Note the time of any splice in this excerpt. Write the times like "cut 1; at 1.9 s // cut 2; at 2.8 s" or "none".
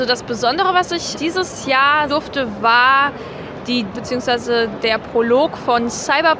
cut 1; at 1.1 s // cut 2; at 2.1 s // cut 3; at 3.9 s

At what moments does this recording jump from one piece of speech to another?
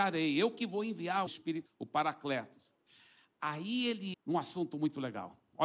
cut 1; at 1.3 s // cut 2; at 1.7 s // cut 3; at 4.1 s

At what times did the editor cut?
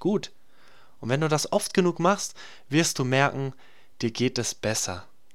none

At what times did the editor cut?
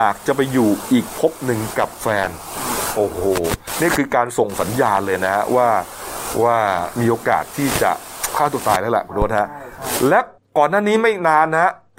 cut 1; at 10.4 s

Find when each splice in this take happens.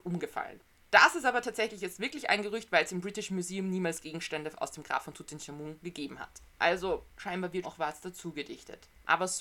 cut 1; at 7.6 s

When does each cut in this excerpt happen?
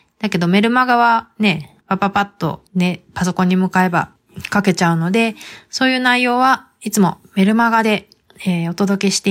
cut 1; at 1.8 s // cut 2; at 2.7 s

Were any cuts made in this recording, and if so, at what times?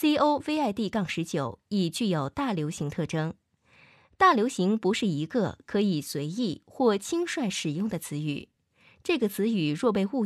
none

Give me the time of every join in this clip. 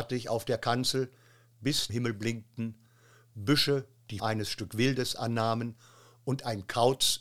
cut 1; at 1.9 s // cut 2; at 4.2 s

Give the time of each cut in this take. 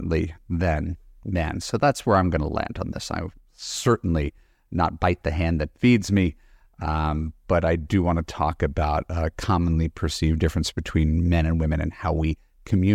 none

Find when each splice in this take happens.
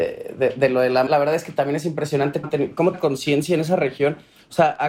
cut 1; at 1.1 s // cut 2; at 2.4 s // cut 3; at 2.9 s

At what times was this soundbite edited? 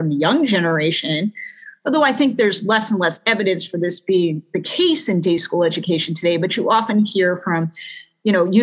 none

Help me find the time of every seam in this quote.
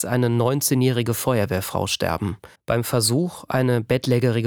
cut 1; at 2.5 s

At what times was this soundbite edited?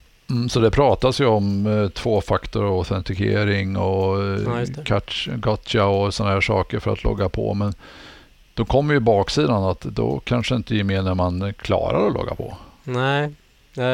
none

